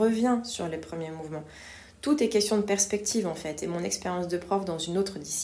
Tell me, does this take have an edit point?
no; 0 cuts

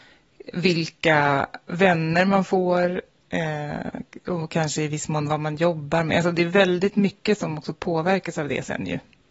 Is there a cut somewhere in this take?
no; 0 cuts

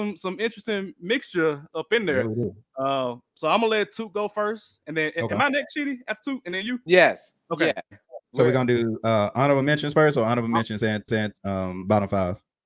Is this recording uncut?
no; 2 cuts; at 8.2 s, 11.1 s

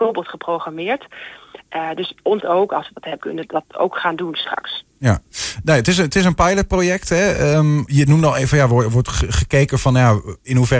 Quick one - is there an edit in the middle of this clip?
yes; 3 cuts; at 2.4 s, 3.2 s, 7.9 s

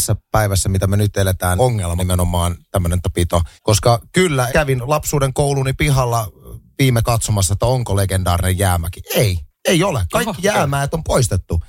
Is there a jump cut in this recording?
yes; 7 cuts; at 1.6 s, 2.0 s, 3.0 s, 3.6 s, 4.5 s, 7.0 s, 9.5 s

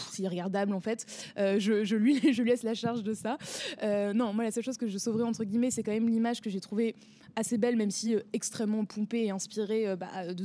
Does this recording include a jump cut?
no; 0 cuts

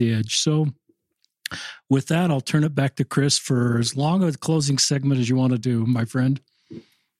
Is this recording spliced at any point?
no; 0 cuts

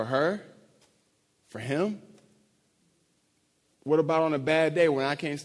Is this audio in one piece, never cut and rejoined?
yes; 0 cuts

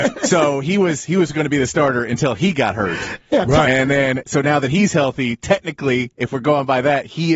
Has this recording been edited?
no; 0 cuts

